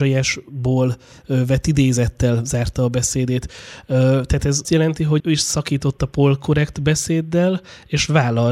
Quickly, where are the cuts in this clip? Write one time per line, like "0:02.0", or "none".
0:04.6
0:05.2